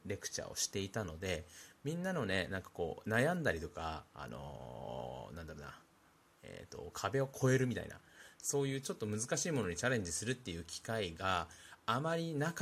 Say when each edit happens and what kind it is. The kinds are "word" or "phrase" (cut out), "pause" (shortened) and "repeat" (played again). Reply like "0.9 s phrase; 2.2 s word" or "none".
none